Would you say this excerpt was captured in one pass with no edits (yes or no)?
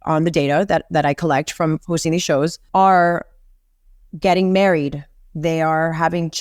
yes